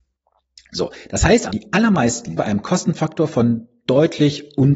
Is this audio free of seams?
no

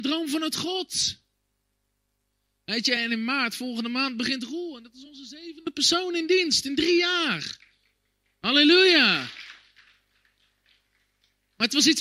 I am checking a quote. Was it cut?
no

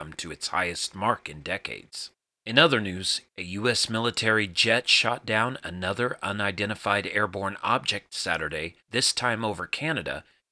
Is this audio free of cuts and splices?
no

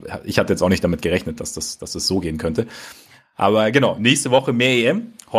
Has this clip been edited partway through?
no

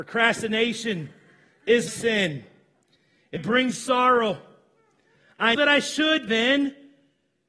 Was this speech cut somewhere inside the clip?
yes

